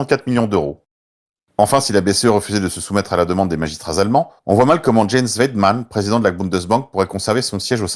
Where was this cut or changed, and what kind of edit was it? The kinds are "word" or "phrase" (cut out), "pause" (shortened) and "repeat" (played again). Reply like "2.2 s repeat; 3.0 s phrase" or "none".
4.4 s pause